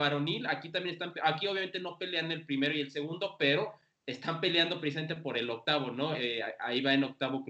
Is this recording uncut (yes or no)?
yes